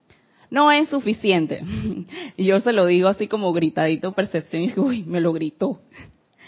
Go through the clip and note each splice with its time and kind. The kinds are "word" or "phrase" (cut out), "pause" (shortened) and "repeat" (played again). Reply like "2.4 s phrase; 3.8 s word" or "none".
4.1 s phrase